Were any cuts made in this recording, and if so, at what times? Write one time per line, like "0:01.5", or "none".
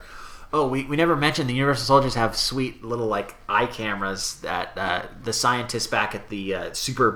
none